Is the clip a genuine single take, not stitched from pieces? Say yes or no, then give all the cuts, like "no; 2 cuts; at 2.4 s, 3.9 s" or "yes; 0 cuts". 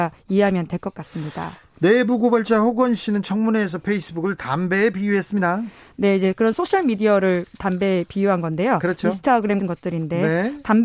no; 1 cut; at 9.6 s